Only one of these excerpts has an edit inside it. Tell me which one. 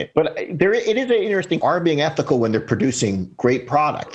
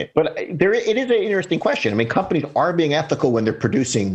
first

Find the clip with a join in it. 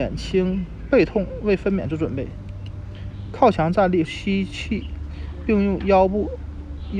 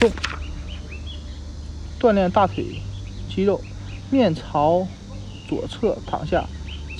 first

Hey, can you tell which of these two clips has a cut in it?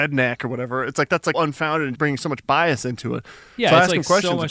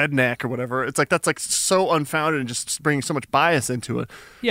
first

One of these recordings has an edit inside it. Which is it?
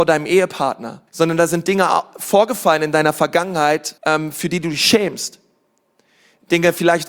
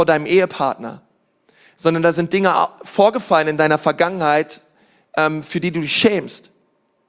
first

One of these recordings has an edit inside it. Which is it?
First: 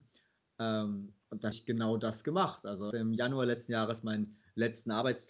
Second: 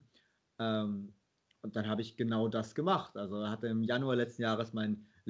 first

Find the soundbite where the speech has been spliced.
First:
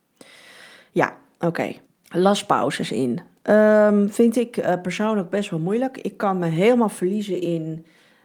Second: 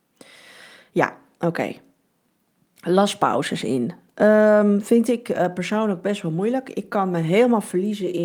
first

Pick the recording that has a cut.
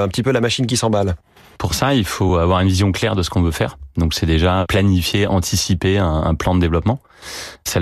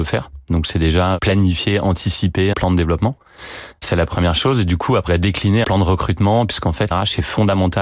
second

